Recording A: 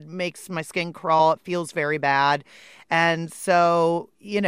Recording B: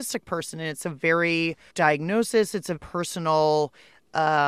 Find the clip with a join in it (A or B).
B